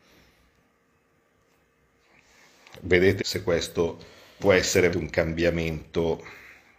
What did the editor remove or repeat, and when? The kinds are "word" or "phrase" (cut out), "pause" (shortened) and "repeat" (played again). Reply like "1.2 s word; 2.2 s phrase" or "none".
3.2 s word; 4.4 s word; 4.9 s word